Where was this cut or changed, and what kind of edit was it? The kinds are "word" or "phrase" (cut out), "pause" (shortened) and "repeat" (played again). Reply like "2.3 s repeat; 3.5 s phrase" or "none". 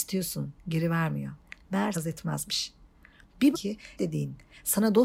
1.9 s phrase; 3.5 s word; 4.0 s word